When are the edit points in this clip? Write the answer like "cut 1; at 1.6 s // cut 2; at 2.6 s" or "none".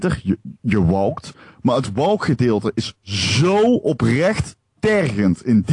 none